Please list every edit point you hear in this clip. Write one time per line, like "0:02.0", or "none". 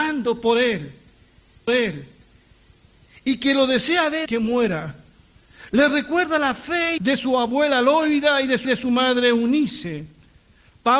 0:01.7
0:04.3
0:07.0
0:08.6